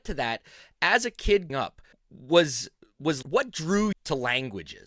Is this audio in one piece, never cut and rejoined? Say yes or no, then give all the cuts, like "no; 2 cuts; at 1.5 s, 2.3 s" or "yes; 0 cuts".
no; 4 cuts; at 1.5 s, 1.9 s, 3.2 s, 3.9 s